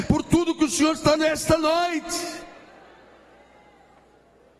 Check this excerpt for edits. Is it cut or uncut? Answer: cut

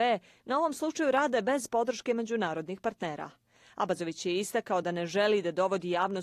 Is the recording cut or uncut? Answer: uncut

